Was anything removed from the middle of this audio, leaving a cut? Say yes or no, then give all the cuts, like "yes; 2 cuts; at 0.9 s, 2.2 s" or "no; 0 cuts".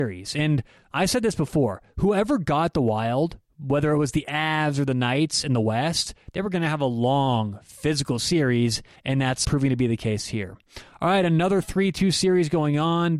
yes; 2 cuts; at 9.0 s, 9.4 s